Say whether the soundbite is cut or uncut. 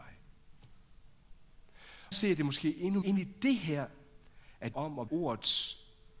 cut